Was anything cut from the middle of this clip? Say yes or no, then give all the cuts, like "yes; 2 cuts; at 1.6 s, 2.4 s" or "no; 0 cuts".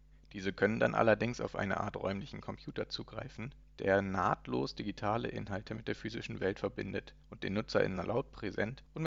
no; 0 cuts